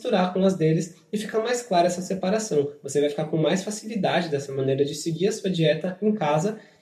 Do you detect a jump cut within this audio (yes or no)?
no